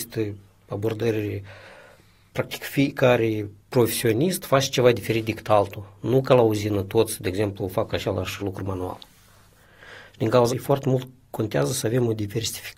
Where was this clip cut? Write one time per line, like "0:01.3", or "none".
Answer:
0:03.6
0:08.4
0:10.5